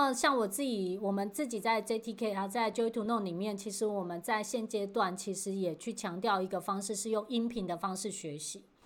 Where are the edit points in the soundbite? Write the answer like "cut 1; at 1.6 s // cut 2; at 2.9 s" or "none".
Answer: none